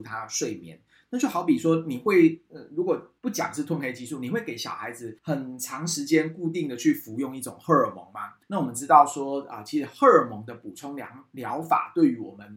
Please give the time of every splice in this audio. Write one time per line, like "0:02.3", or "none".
0:03.2
0:05.2
0:08.4